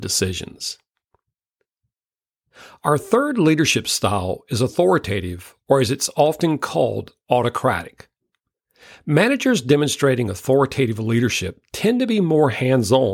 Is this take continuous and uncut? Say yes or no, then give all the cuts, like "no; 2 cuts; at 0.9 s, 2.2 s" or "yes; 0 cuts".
yes; 0 cuts